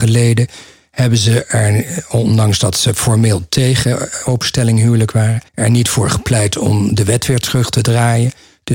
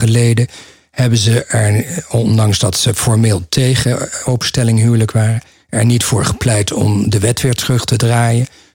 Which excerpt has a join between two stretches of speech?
first; 1 cut; at 5.5 s

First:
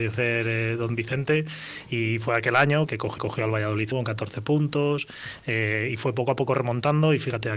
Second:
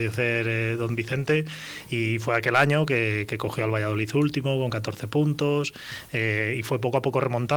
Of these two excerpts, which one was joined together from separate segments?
first; 3 cuts; at 2.9 s, 3.2 s, 3.9 s

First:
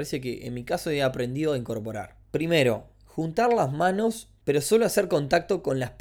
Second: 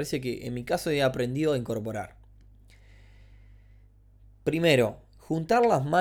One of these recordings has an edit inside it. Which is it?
first; 2 cuts; at 2.2 s, 4.4 s

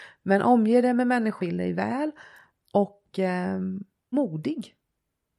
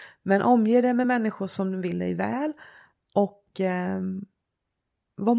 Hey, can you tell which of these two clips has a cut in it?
first; 2 cuts; at 1.4 s, 4.1 s

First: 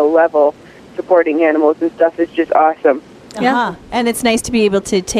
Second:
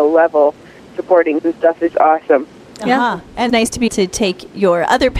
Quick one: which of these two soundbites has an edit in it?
second; 4 cuts; at 1.4 s, 1.9 s, 3.5 s, 3.9 s

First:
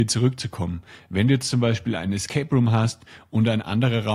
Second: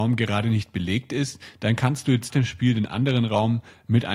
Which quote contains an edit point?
second; 1 cut; at 2.3 s

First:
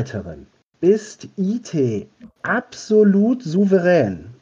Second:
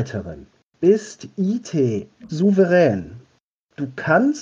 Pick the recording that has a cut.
second; 1 cut; at 2.3 s

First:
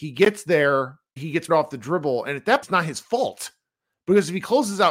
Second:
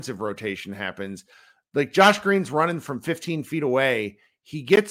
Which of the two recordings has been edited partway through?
first; 3 cuts; at 1.2 s, 1.5 s, 2.6 s

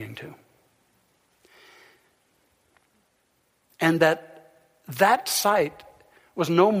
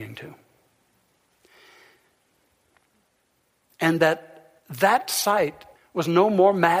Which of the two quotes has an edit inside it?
second; 2 cuts; at 4.6 s, 5.8 s

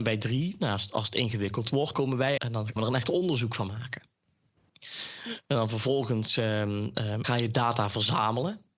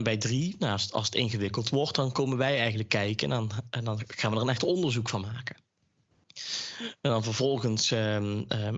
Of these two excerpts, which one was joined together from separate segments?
first; 4 cuts; at 1.9 s, 2.4 s, 2.8 s, 7.2 s

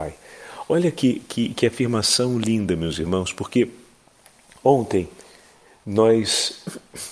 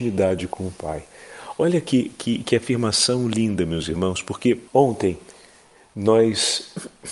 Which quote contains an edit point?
second; 1 cut; at 4.7 s

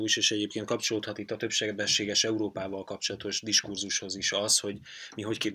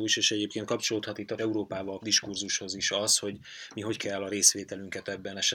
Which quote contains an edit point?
second; 3 cuts; at 1.4 s, 2.0 s, 4.0 s

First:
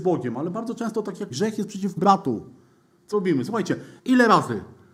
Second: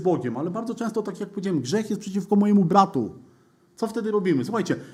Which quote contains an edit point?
first; 4 cuts; at 1.3 s, 2.0 s, 3.1 s, 4.0 s

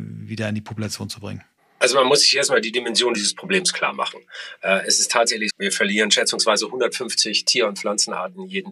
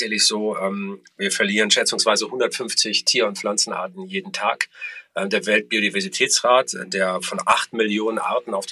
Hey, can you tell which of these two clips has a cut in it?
first; 2 cuts; at 1.6 s, 5.5 s

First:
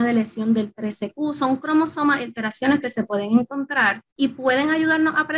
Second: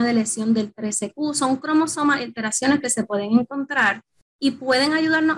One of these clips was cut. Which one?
first; 1 cut; at 4.1 s

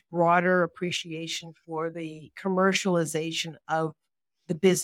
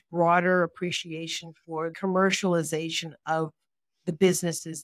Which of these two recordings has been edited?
second; 1 cut; at 1.9 s

